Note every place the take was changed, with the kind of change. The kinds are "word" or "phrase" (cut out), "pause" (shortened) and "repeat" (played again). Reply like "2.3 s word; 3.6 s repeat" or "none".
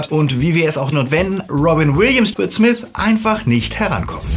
0.9 s word; 1.5 s word; 2.3 s word